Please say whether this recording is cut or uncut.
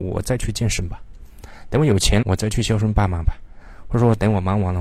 cut